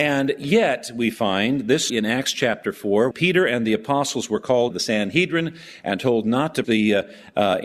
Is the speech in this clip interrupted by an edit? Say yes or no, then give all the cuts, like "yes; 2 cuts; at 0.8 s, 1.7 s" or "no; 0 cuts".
yes; 4 cuts; at 1.9 s, 3.1 s, 4.7 s, 6.6 s